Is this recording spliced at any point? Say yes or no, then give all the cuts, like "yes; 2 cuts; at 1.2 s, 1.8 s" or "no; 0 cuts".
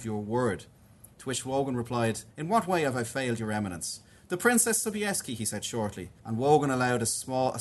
yes; 2 cuts; at 2.3 s, 6.2 s